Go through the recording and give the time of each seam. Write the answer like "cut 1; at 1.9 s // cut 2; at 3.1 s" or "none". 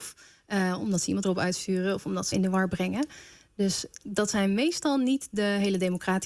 cut 1; at 1.2 s // cut 2; at 2.3 s